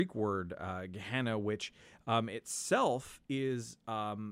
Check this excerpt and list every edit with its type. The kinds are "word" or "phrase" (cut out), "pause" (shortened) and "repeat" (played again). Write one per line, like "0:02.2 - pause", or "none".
none